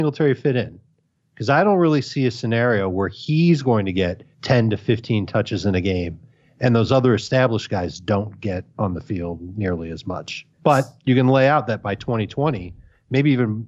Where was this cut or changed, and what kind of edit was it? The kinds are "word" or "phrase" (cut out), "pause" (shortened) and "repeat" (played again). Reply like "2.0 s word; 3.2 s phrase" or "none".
4.3 s pause; 10.5 s pause